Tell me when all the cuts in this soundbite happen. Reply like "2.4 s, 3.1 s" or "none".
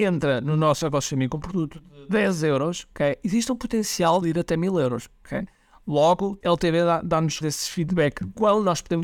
1.4 s, 4.2 s, 6.4 s, 7.4 s